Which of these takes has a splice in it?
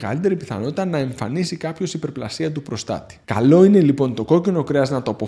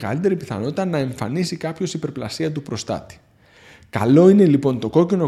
first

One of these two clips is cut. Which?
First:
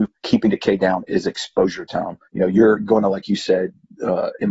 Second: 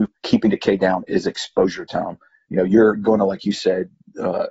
first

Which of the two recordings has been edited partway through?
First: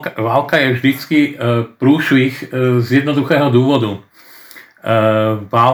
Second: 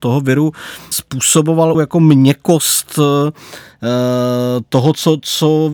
second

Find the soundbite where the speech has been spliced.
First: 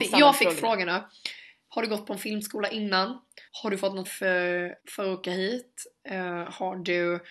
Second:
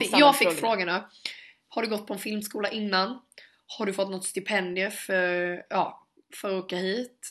first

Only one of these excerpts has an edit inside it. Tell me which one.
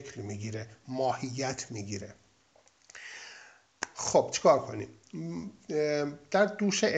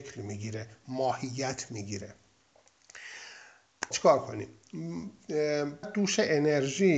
second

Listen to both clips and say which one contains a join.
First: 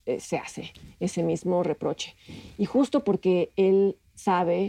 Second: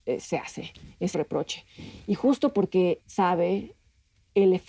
second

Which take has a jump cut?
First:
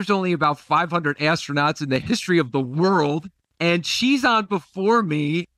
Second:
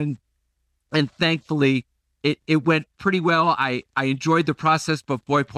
first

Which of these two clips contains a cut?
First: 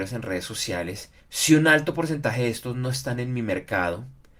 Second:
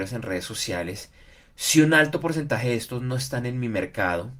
first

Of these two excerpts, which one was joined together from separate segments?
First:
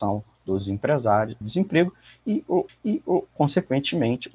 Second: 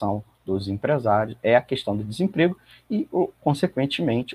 first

